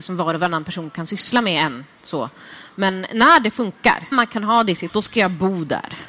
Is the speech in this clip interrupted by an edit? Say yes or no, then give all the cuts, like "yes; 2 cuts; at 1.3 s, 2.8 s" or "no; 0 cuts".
yes; 2 cuts; at 4.1 s, 4.9 s